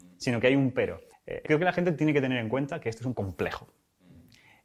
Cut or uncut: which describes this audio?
cut